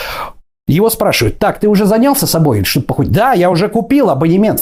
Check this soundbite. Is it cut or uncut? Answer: uncut